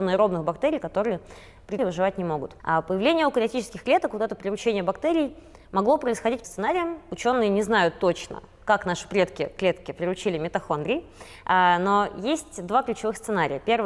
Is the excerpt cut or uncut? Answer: cut